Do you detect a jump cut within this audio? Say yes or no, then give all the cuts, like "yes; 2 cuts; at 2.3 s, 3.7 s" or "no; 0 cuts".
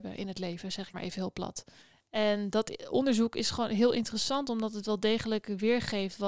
yes; 2 cuts; at 0.9 s, 1.8 s